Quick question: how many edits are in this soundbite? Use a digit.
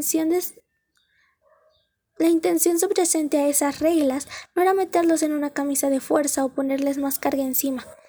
0